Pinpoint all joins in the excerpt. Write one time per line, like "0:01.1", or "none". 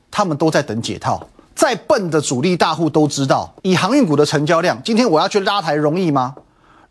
0:01.4
0:03.6